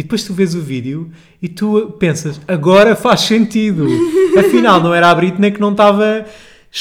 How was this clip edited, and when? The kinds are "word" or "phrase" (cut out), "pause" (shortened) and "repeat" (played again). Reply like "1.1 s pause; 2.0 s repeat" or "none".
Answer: none